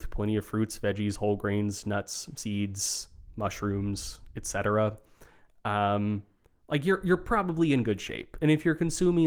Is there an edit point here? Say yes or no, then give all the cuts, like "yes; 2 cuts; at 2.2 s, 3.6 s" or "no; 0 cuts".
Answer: no; 0 cuts